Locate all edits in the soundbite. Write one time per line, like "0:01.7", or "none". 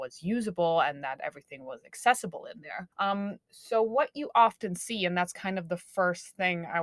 0:02.9